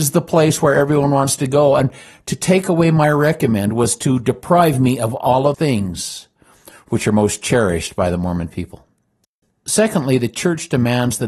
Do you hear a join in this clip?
yes; 1 cut; at 5.5 s

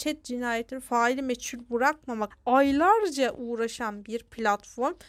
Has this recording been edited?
yes; 1 cut; at 2.3 s

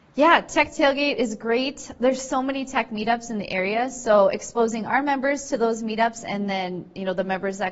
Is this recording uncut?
yes; 0 cuts

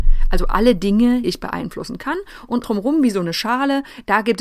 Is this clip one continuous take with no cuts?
no; 2 cuts; at 1.2 s, 2.6 s

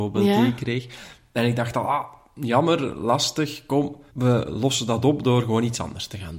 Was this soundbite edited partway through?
yes; 1 cut; at 4.1 s

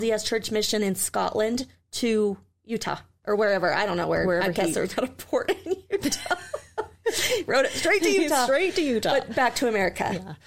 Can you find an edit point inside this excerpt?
no; 0 cuts

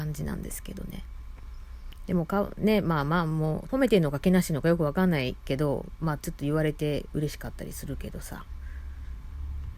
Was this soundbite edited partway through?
yes; 1 cut; at 3.7 s

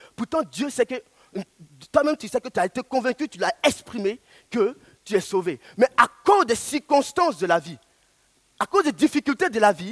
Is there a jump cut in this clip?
no; 0 cuts

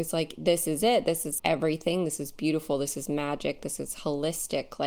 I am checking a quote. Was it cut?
yes; 1 cut; at 1.4 s

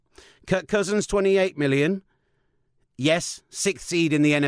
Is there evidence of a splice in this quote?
no; 0 cuts

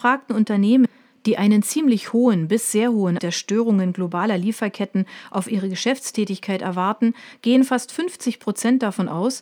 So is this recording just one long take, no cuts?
no; 1 cut; at 3.2 s

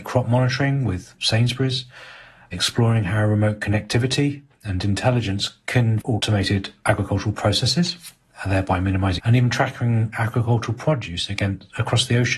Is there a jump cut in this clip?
yes; 3 cuts; at 4.8 s, 6.0 s, 9.2 s

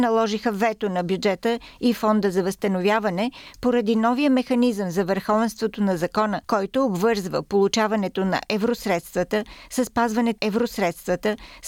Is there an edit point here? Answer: yes; 2 cuts; at 6.4 s, 10.4 s

